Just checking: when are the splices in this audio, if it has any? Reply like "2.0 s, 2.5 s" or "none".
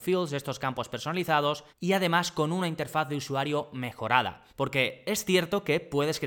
1.7 s, 4.5 s

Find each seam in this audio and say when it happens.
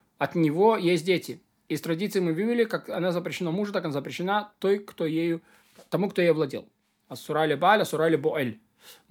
none

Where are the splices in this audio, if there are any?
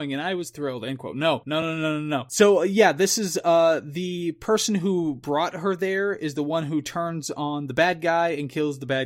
none

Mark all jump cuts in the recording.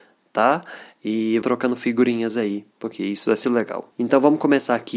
1.4 s, 3.4 s

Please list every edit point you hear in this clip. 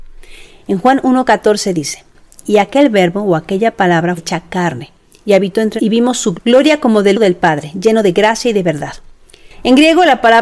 4.2 s, 5.8 s, 6.3 s, 7.1 s

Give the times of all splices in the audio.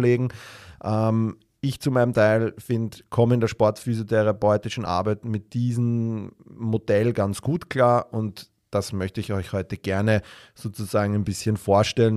none

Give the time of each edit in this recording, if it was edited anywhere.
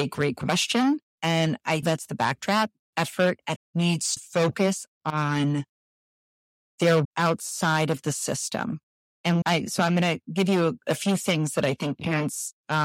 1.8 s, 2.9 s, 3.6 s, 4.2 s, 7.0 s, 9.4 s

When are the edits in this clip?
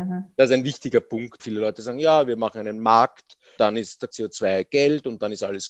1.4 s, 3.6 s, 4.1 s

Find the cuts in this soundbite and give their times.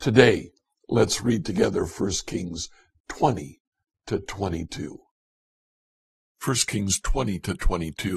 none

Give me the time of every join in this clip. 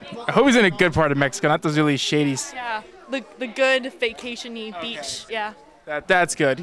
5.3 s

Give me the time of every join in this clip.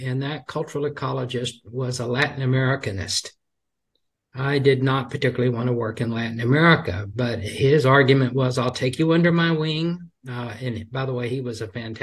none

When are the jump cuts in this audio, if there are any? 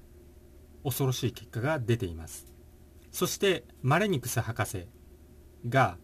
3.1 s, 3.7 s

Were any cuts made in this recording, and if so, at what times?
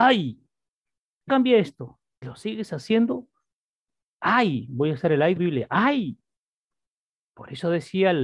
1.3 s, 2.2 s, 5.4 s

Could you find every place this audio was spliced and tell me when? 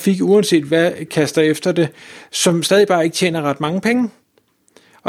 1.1 s

